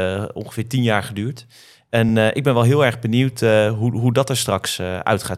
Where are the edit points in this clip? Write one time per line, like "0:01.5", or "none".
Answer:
none

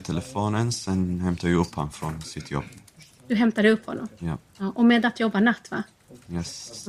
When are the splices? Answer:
none

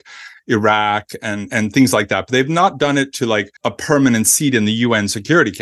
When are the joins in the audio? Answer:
0:03.6

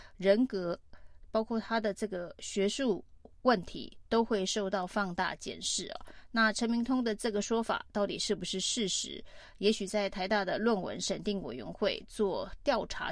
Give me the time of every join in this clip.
none

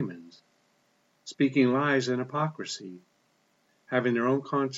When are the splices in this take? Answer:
none

